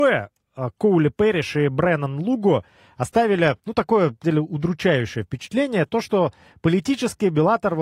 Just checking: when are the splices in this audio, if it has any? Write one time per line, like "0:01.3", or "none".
0:03.6
0:04.2
0:05.9